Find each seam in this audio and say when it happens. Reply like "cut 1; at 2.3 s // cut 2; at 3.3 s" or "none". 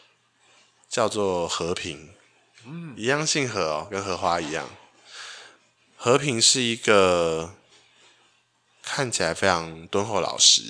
none

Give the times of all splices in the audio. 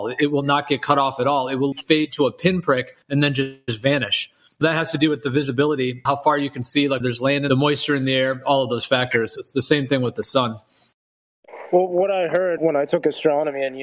cut 1; at 1.7 s // cut 2; at 3.0 s // cut 3; at 4.6 s // cut 4; at 6.1 s // cut 5; at 7.0 s // cut 6; at 7.5 s // cut 7; at 12.6 s

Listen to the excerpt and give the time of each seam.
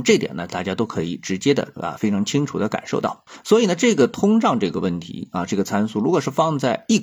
none

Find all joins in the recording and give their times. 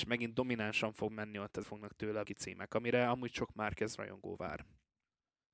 cut 1; at 1.6 s // cut 2; at 2.3 s

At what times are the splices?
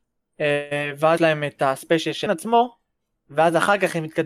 cut 1; at 1.2 s // cut 2; at 2.3 s

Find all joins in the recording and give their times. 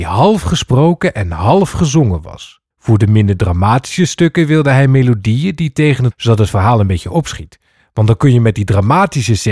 cut 1; at 2.7 s // cut 2; at 6.1 s

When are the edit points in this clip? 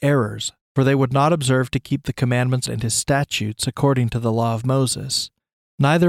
cut 1; at 2.7 s

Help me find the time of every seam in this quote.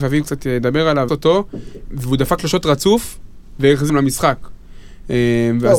cut 1; at 1.1 s // cut 2; at 1.9 s // cut 3; at 2.4 s // cut 4; at 3.9 s

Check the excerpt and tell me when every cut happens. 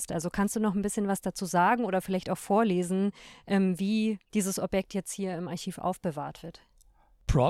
cut 1; at 4.2 s

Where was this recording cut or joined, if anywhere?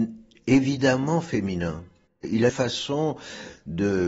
cut 1; at 2.5 s

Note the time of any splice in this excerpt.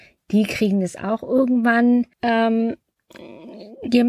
cut 1; at 2.1 s

